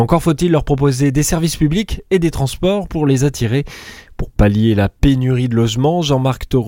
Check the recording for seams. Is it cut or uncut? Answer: uncut